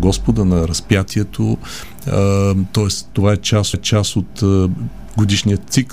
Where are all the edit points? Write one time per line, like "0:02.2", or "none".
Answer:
0:03.7